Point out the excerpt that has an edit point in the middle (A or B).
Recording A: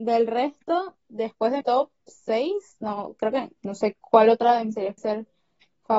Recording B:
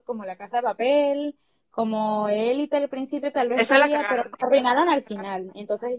A